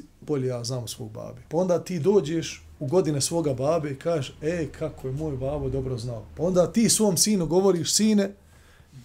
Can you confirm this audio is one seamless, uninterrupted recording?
no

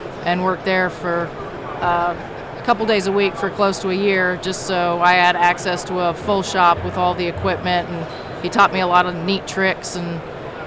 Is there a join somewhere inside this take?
no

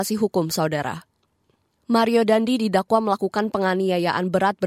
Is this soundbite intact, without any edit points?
yes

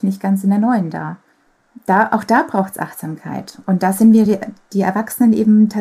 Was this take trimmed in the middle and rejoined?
no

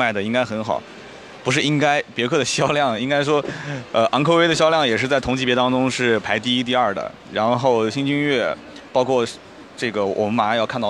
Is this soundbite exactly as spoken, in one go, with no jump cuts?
yes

